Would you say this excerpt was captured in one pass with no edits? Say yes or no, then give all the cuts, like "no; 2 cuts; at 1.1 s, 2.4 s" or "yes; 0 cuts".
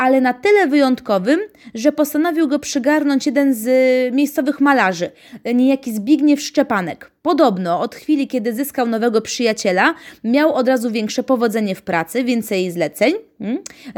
yes; 0 cuts